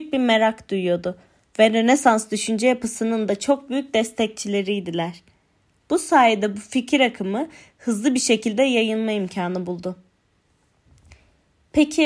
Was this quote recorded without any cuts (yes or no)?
yes